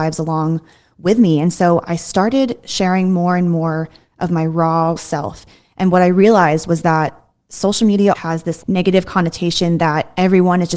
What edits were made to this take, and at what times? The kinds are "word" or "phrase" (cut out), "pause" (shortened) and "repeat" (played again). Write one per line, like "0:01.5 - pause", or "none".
0:05.0 - word
0:08.1 - word
0:08.6 - word